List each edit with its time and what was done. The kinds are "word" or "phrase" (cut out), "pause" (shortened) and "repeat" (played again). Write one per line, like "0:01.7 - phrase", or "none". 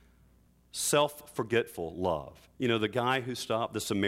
0:02.5 - pause